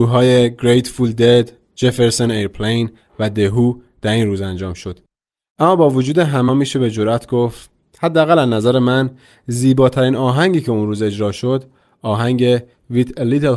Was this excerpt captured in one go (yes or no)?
no